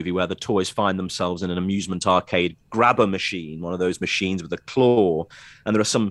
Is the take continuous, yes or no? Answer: yes